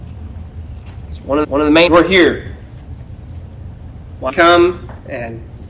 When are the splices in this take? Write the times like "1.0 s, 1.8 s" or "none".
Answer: 1.4 s, 1.9 s, 4.3 s